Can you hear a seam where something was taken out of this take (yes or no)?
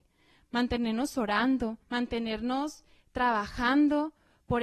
yes